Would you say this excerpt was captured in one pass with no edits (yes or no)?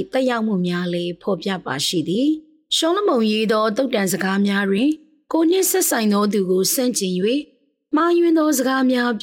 yes